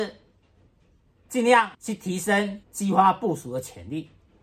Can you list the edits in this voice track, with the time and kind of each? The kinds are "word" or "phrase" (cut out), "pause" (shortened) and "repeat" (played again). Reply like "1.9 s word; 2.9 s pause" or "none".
1.7 s pause; 2.6 s pause